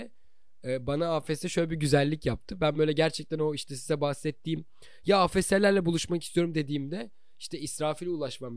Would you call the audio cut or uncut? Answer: uncut